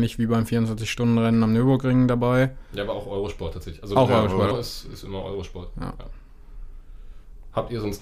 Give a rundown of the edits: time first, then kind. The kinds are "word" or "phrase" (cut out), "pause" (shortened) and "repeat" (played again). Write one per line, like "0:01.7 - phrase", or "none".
0:04.5 - word